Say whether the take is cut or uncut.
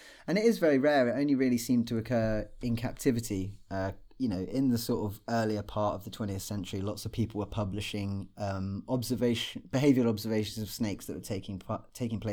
uncut